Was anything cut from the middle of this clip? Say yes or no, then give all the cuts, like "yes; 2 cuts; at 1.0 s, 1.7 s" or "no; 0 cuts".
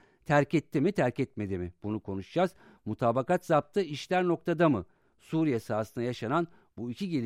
no; 0 cuts